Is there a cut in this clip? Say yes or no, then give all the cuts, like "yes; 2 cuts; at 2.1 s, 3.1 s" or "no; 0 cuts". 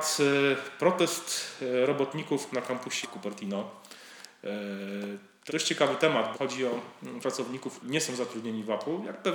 yes; 6 cuts; at 2.5 s, 3.0 s, 5.5 s, 6.3 s, 7.2 s, 7.8 s